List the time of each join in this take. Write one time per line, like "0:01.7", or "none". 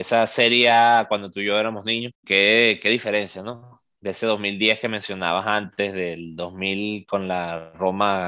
0:02.1